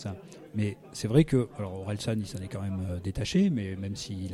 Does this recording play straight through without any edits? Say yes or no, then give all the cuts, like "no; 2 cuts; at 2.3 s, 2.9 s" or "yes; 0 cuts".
yes; 0 cuts